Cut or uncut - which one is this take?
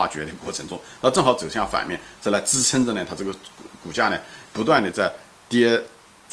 cut